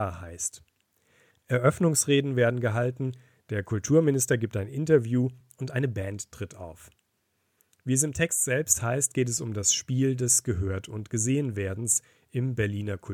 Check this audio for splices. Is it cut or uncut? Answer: uncut